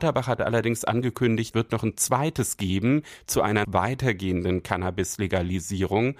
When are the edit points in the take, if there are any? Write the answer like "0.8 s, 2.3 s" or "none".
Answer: 1.5 s, 2.6 s, 3.6 s